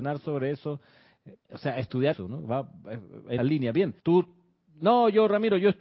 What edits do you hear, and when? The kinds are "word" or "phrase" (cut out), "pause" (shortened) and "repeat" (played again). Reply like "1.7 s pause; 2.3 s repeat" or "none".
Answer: 1.4 s word; 2.1 s word; 3.4 s phrase; 4.0 s pause